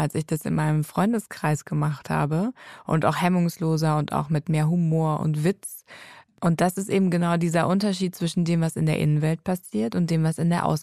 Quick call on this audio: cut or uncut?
uncut